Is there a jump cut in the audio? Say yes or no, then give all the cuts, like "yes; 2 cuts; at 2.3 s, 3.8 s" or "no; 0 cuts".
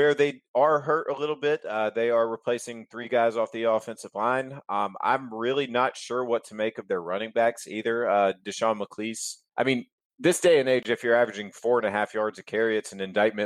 yes; 1 cut; at 9.5 s